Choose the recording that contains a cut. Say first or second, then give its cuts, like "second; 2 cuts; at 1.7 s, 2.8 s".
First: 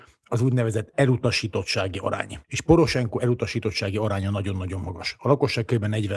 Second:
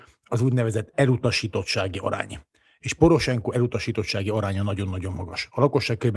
first; 1 cut; at 2.4 s